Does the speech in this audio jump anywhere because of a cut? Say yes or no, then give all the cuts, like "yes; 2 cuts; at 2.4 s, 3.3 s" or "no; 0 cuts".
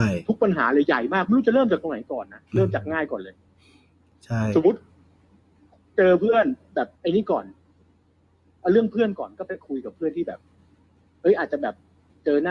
yes; 1 cut; at 6.9 s